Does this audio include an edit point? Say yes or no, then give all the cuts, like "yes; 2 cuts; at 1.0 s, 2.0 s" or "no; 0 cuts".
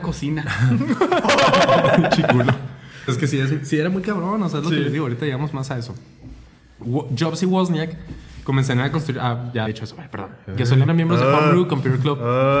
yes; 3 cuts; at 3.1 s, 9.7 s, 10.9 s